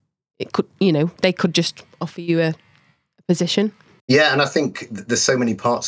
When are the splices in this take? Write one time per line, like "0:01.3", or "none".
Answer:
none